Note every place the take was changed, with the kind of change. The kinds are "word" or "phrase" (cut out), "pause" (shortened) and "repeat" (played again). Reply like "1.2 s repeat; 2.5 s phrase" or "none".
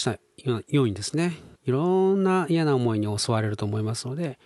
1.5 s pause